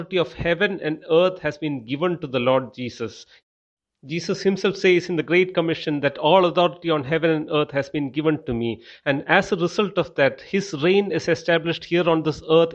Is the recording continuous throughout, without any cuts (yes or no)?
yes